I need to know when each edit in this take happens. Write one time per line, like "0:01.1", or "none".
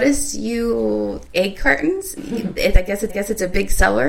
0:01.3
0:02.2
0:03.1